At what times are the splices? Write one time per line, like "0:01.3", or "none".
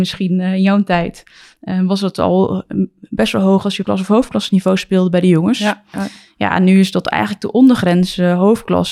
0:03.8